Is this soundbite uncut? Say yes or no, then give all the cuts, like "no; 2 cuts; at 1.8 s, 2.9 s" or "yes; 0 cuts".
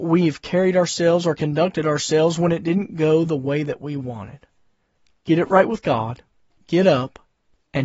yes; 0 cuts